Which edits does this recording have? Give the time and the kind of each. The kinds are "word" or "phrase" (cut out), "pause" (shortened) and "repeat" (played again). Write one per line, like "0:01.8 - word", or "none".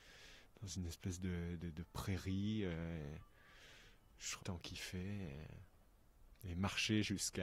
0:04.4 - phrase